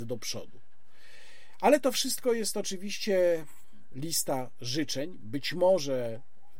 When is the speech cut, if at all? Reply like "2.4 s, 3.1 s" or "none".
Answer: 3.9 s